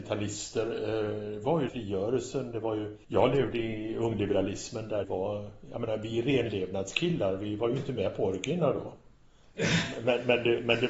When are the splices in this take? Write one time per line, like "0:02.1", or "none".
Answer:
0:01.7
0:03.0
0:05.0